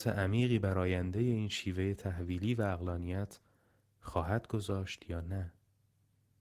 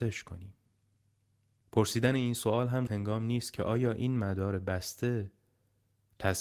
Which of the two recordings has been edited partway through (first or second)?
second